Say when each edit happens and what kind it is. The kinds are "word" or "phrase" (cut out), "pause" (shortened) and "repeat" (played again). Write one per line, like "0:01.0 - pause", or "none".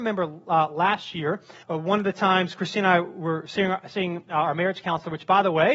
0:01.6 - word